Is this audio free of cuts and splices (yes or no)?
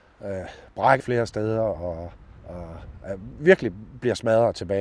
no